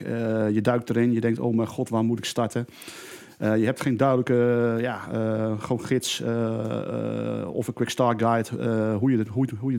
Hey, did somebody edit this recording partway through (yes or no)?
no